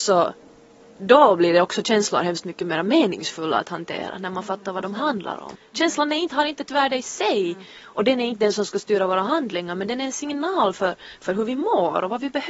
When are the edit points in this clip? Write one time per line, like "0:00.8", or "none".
none